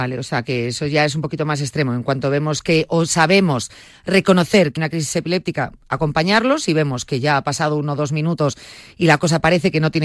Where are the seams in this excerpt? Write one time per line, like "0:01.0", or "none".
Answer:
0:04.8